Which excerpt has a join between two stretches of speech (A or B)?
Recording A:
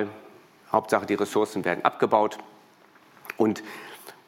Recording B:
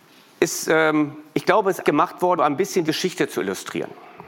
B